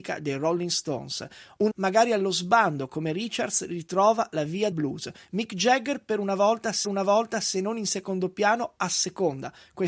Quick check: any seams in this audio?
yes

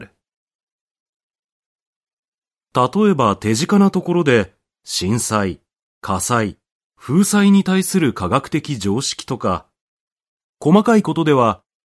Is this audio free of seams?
yes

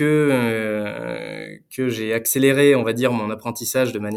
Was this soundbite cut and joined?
no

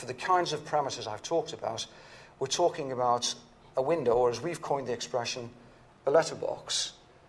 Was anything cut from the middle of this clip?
no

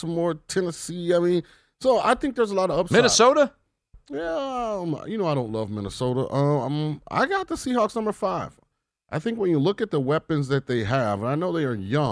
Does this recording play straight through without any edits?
yes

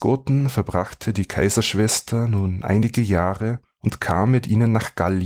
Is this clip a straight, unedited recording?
no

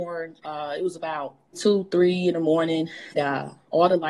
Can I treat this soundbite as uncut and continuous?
no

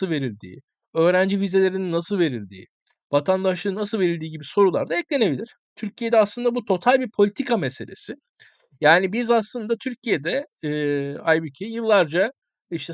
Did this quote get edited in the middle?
no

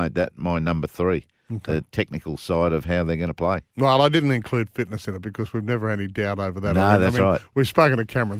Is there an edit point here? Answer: no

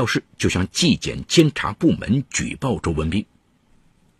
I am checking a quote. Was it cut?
no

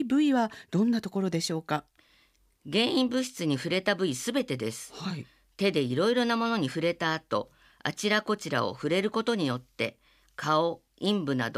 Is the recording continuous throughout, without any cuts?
yes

